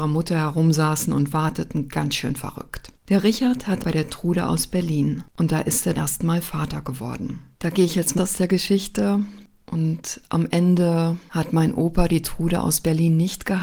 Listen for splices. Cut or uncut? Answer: cut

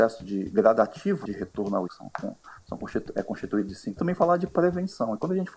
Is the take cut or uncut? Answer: cut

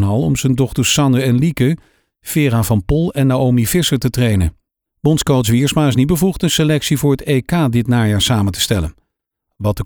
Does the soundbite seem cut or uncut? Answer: uncut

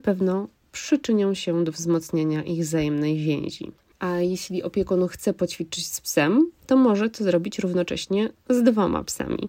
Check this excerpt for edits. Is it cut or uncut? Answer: uncut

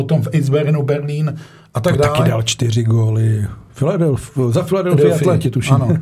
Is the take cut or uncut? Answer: uncut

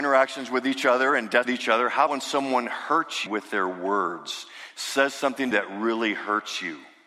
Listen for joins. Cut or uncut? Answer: cut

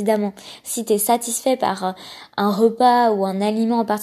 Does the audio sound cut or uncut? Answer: uncut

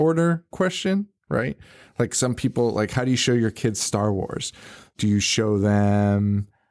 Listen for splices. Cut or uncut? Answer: uncut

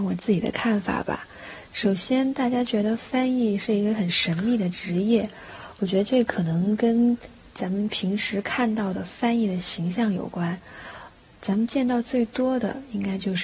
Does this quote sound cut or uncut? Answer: uncut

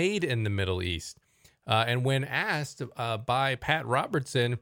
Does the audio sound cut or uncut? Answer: uncut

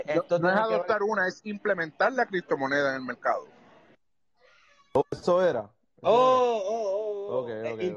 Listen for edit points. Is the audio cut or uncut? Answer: uncut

